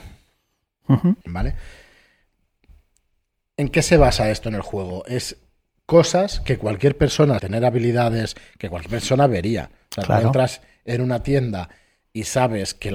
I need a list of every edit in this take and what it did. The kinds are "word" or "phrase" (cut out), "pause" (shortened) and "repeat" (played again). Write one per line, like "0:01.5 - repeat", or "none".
0:01.2 - pause
0:07.4 - word